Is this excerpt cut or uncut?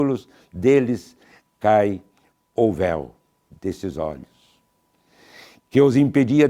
uncut